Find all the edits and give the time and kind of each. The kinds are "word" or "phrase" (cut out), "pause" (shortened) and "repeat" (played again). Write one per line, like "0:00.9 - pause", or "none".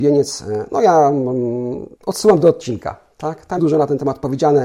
0:01.9 - pause
0:03.6 - word